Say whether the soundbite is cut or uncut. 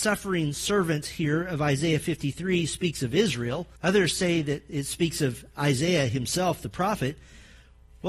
cut